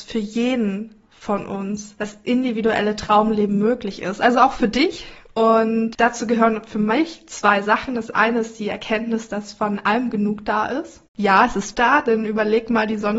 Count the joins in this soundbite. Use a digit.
2